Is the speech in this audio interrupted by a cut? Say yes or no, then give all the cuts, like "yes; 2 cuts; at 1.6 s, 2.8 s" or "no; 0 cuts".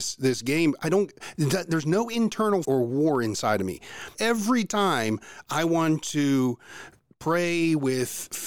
yes; 2 cuts; at 2.6 s, 4.1 s